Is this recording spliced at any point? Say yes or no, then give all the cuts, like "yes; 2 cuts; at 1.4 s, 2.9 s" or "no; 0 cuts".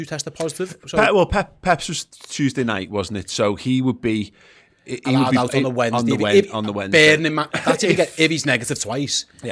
no; 0 cuts